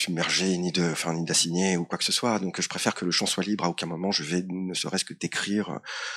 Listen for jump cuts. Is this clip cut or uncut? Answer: uncut